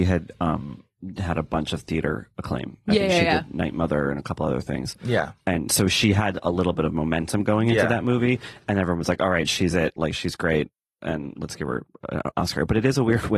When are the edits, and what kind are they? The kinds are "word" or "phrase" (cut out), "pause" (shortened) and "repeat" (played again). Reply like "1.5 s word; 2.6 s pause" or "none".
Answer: none

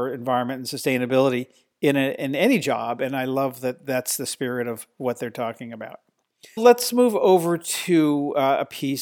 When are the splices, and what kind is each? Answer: 6.6 s word

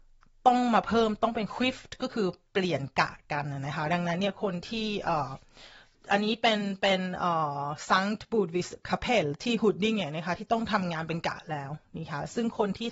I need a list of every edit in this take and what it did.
none

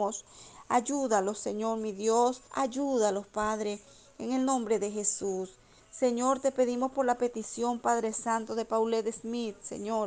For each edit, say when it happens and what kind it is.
2.5 s pause

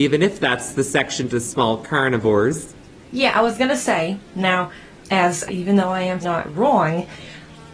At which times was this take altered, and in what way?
1.3 s word; 4.9 s word; 5.5 s word; 6.2 s word

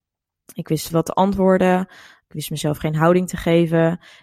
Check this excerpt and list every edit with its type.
0.9 s phrase

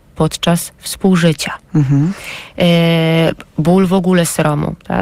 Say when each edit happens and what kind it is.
none

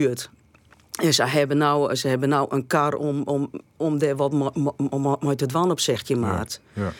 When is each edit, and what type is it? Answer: none

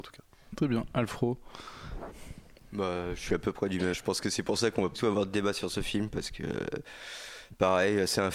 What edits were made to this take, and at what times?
3.9 s word; 4.9 s word

